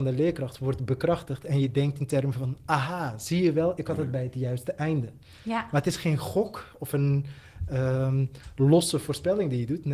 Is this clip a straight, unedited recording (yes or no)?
yes